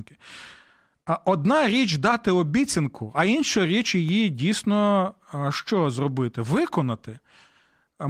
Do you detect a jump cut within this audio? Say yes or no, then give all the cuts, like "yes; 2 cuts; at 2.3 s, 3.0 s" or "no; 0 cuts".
no; 0 cuts